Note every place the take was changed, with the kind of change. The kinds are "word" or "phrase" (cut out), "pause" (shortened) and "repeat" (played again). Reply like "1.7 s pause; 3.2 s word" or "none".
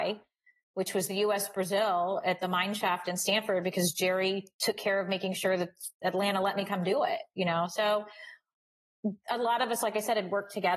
none